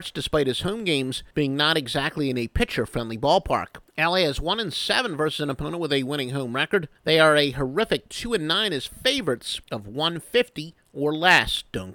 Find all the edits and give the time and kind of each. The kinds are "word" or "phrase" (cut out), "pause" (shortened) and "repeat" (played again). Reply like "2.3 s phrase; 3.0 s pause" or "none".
1.3 s pause; 3.9 s pause; 7.0 s pause; 9.6 s pause